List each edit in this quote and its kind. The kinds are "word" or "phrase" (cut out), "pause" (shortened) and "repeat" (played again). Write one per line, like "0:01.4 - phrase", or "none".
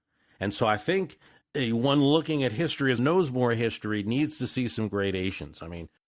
0:03.0 - word